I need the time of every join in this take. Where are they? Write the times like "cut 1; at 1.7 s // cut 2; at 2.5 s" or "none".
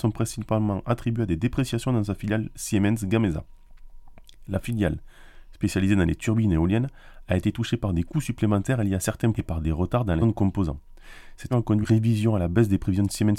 cut 1; at 9.3 s // cut 2; at 10.2 s // cut 3; at 11.5 s // cut 4; at 11.8 s

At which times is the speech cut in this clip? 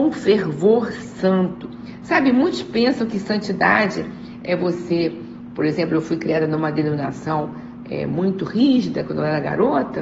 none

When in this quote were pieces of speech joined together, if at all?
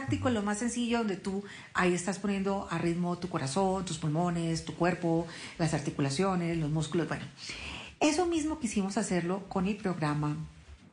none

